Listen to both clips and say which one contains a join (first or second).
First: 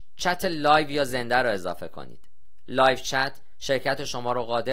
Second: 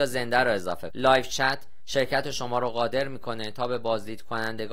second